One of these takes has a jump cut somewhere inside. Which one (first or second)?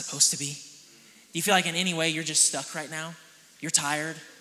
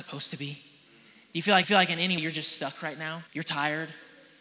second